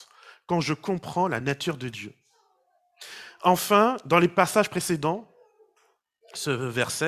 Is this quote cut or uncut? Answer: uncut